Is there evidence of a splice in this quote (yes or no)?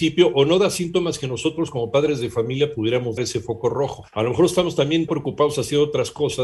yes